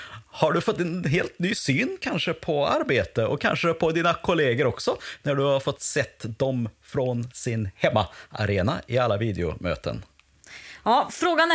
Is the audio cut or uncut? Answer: uncut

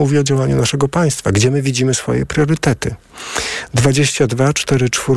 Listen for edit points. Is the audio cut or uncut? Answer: uncut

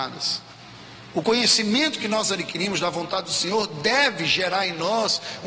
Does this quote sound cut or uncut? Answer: uncut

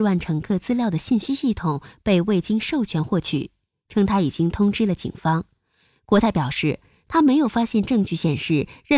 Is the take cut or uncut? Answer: uncut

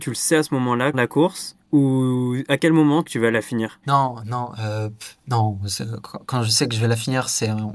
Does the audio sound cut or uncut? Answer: cut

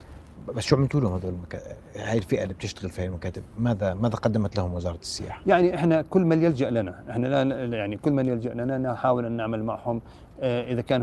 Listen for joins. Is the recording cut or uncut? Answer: uncut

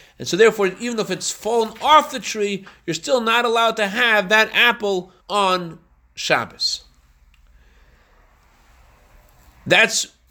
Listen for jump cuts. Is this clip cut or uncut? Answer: cut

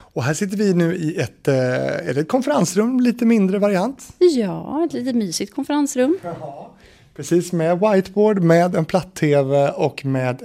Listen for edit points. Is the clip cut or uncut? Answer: uncut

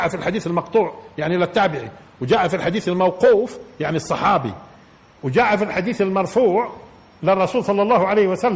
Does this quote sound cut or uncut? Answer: uncut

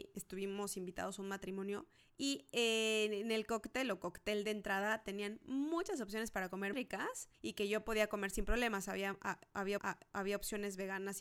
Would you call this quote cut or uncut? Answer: cut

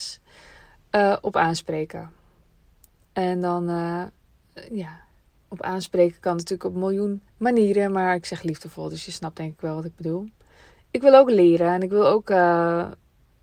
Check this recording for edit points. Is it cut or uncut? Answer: cut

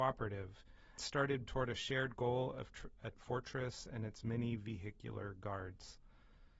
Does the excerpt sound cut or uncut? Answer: cut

